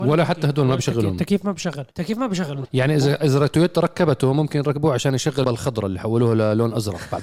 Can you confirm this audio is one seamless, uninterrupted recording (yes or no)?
no